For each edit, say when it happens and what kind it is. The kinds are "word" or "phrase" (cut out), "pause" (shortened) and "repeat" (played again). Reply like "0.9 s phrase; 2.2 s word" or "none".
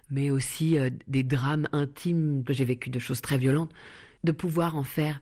2.5 s phrase